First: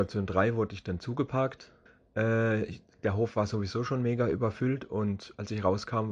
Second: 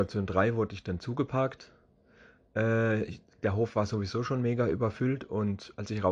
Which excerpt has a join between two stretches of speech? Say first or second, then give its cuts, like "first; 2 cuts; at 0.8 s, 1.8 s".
first; 1 cut; at 1.9 s